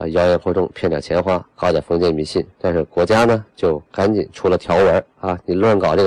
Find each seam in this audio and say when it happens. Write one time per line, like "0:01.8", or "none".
0:01.5
0:02.5
0:03.9